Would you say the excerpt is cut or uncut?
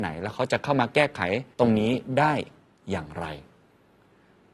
cut